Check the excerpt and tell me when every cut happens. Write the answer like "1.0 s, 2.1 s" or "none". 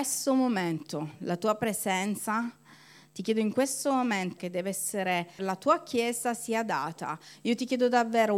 4.4 s, 5.4 s